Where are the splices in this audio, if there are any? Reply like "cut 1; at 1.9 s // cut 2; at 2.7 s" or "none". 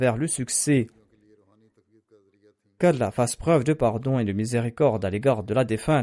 none